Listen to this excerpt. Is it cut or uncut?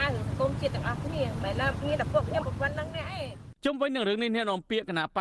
cut